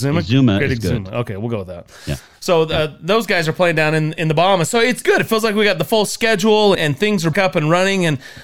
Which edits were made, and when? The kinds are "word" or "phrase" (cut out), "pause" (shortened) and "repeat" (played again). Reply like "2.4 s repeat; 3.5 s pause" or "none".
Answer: 5.0 s word; 6.7 s word; 7.3 s word